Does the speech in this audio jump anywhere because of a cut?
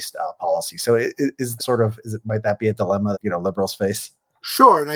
yes; 2 cuts; at 1.6 s, 3.1 s

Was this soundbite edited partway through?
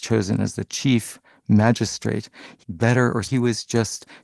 yes; 2 cuts; at 2.6 s, 3.3 s

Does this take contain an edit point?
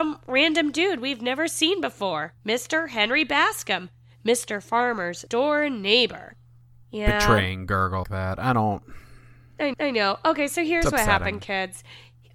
yes; 4 cuts; at 2.4 s, 5.3 s, 8.0 s, 9.7 s

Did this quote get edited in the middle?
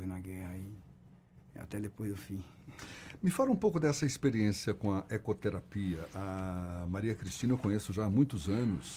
no; 0 cuts

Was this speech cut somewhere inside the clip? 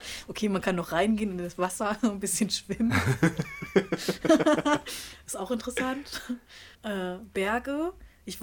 yes; 1 cut; at 6.7 s

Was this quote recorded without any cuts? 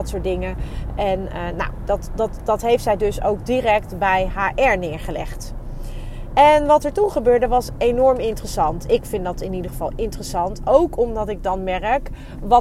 yes; 0 cuts

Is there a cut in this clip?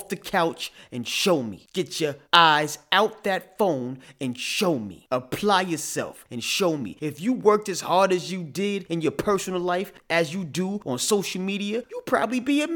yes; 1 cut; at 2.2 s

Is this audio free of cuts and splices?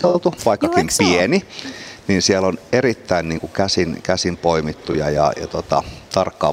yes; 0 cuts

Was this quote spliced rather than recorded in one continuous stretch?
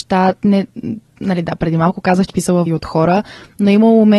yes; 2 cuts; at 2.3 s, 2.7 s

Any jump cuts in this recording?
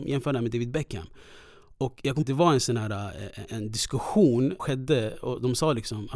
yes; 3 cuts; at 2.2 s, 3.5 s, 4.6 s

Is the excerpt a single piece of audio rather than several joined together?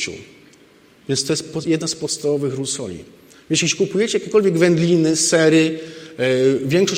yes; 0 cuts

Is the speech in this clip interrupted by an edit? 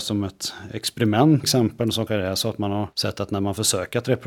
yes; 3 cuts; at 1.4 s, 2.1 s, 2.9 s

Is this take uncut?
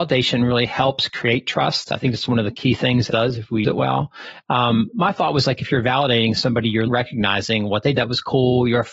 no; 4 cuts; at 3.1 s, 3.6 s, 6.9 s, 7.9 s

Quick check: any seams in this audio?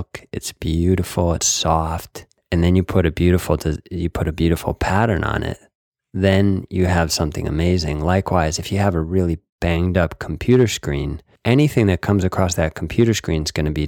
no; 0 cuts

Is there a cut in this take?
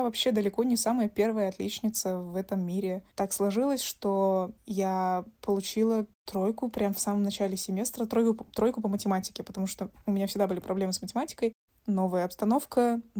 no; 0 cuts

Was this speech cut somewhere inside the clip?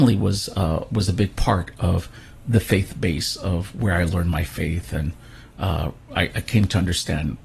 no; 0 cuts

